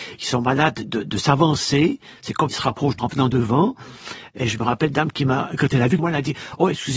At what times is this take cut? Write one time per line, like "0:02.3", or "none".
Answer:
0:02.5
0:03.0
0:04.9
0:06.0